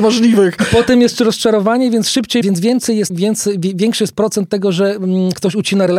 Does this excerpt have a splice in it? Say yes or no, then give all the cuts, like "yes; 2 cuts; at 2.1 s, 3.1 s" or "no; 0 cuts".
yes; 2 cuts; at 2.4 s, 3.1 s